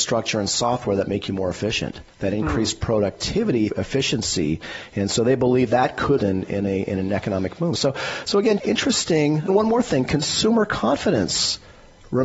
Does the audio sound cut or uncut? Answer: cut